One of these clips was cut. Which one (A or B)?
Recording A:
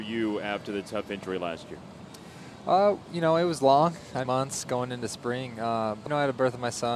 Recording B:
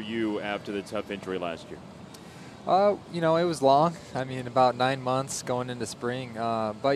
A